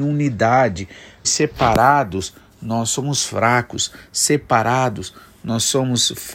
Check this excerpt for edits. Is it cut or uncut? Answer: cut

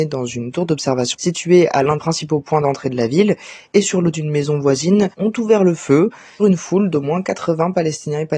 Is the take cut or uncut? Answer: cut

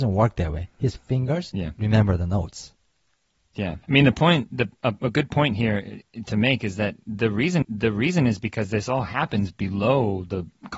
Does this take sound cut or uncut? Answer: cut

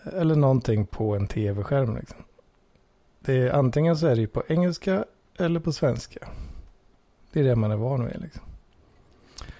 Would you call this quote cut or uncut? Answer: uncut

